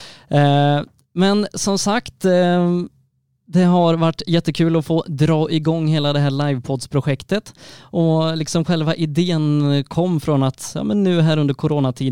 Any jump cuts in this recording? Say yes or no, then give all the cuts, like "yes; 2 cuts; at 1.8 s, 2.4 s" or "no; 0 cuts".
no; 0 cuts